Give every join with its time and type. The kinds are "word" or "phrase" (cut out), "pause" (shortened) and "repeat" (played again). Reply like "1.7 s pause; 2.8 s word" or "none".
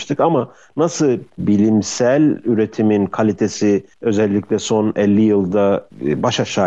3.9 s pause